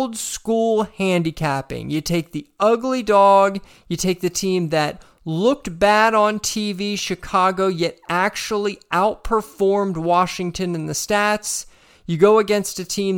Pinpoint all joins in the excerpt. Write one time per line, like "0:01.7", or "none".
none